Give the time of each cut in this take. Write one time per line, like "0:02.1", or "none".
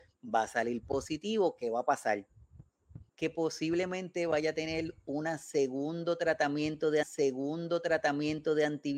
0:03.1
0:07.0